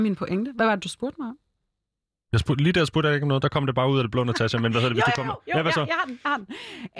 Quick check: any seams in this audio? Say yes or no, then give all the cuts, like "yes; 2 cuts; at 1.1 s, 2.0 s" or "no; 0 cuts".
no; 0 cuts